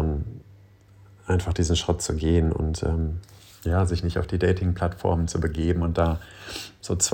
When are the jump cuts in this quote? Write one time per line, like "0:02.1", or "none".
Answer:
none